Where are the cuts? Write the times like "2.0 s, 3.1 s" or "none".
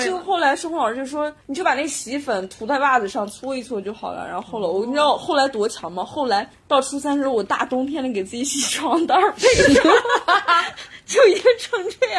1.4 s, 6.5 s